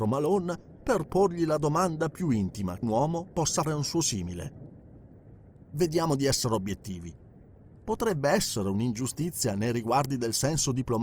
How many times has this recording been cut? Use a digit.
2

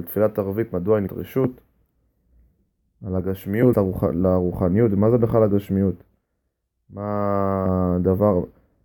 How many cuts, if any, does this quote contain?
2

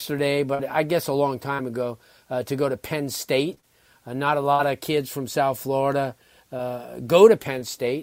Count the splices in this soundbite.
0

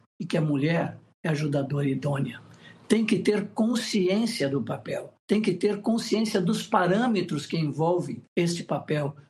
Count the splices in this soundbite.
2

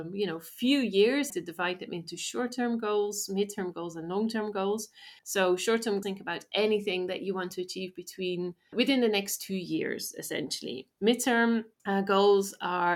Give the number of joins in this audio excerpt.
5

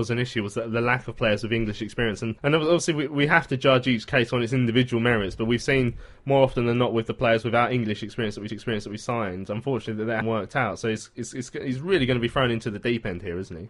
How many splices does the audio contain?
3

